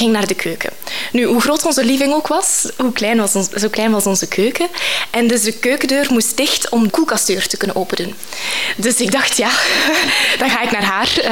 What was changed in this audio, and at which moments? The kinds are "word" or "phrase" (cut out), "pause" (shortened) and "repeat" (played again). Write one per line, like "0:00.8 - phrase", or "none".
0:06.9 - word